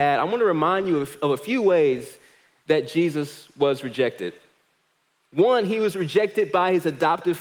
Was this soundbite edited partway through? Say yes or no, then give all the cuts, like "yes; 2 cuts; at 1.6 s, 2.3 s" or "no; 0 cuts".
no; 0 cuts